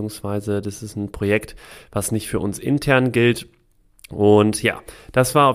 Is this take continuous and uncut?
yes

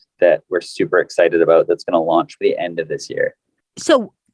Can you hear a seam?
yes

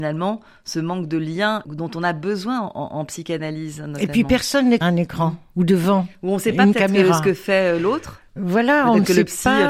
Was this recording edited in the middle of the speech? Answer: yes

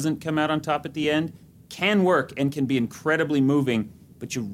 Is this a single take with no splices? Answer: yes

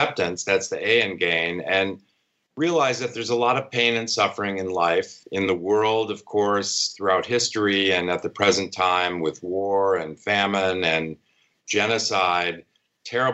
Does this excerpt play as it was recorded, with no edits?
yes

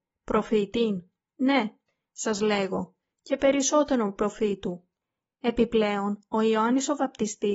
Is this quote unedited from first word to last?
yes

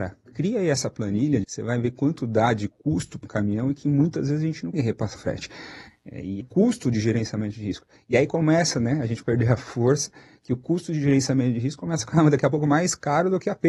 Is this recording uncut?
no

